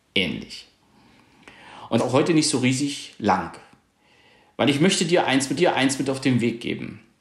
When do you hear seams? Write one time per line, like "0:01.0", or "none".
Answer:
0:02.0
0:05.6